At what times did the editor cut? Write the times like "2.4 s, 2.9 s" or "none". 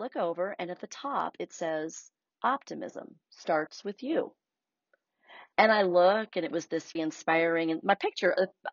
3.2 s, 7.0 s